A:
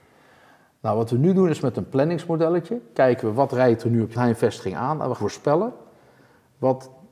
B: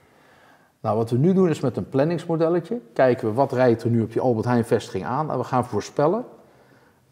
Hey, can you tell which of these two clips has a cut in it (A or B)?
A